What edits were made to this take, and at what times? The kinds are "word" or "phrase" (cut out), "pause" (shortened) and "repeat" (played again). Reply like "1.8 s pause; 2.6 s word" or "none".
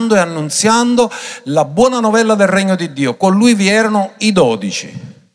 none